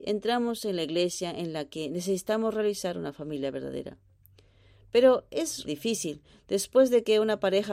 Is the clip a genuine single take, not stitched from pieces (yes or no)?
no